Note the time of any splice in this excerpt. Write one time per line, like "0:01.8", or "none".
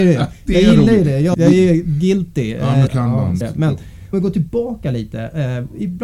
0:01.3
0:02.9
0:03.4
0:04.1